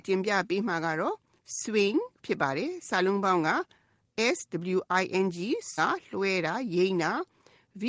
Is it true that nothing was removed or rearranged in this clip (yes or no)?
no